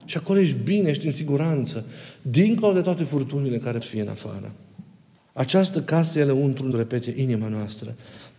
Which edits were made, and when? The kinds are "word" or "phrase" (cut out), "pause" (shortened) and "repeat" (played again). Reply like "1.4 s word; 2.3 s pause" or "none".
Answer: 3.8 s word; 5.2 s pause; 6.7 s word